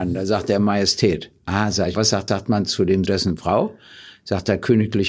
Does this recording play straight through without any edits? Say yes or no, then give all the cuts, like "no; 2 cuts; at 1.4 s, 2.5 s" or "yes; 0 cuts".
no; 3 cuts; at 1.9 s, 2.3 s, 3.1 s